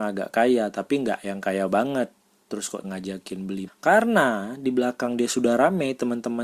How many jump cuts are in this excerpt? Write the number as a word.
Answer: three